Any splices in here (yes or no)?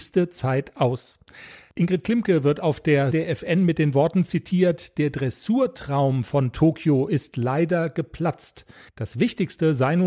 yes